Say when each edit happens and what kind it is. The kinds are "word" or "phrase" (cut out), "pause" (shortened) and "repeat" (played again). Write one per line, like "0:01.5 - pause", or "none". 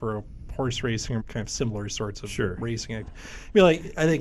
0:01.2 - word